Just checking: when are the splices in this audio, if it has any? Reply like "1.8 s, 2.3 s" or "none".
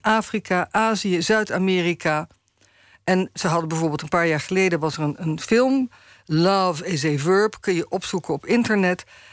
none